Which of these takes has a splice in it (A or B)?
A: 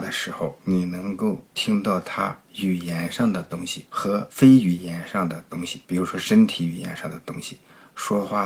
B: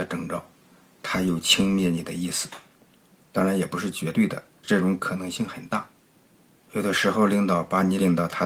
A